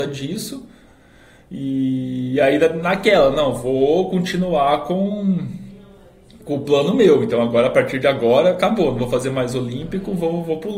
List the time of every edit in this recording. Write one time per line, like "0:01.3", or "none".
none